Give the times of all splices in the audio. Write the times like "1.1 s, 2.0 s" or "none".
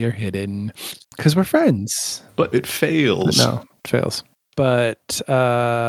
1.0 s, 2.5 s, 3.8 s, 4.3 s

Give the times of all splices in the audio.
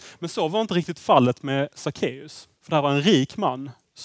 2.6 s

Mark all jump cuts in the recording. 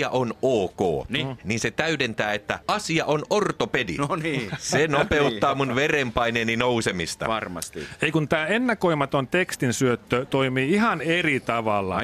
2.6 s

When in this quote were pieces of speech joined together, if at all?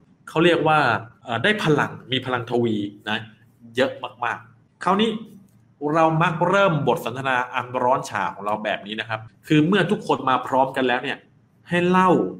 none

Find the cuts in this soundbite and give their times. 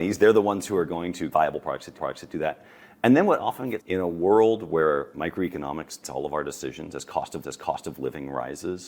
1.3 s, 2.0 s, 3.8 s, 6.0 s, 7.4 s

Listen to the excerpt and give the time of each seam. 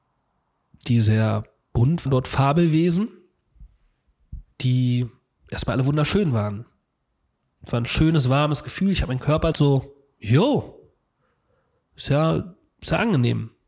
2.1 s, 4.5 s, 9.5 s

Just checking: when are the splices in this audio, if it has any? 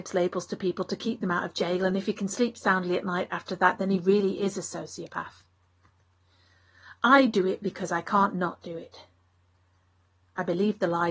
none

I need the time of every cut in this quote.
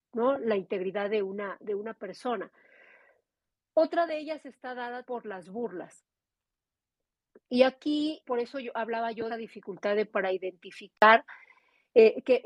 5.1 s, 8.2 s, 9.3 s, 10.1 s

